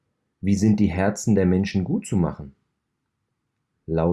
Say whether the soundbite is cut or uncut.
uncut